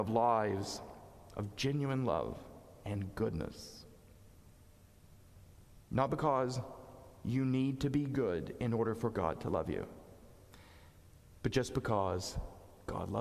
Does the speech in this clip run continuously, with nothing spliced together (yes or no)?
yes